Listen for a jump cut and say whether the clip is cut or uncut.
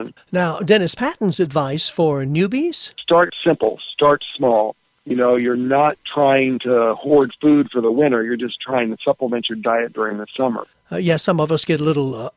uncut